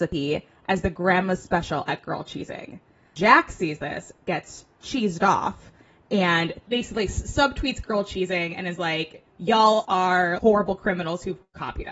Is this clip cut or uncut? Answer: uncut